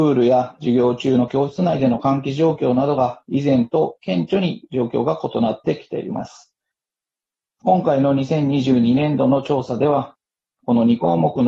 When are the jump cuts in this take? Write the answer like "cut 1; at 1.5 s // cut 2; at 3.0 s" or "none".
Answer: none